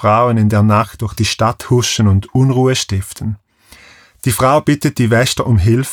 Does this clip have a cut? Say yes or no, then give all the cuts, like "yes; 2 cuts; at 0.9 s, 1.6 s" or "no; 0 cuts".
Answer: no; 0 cuts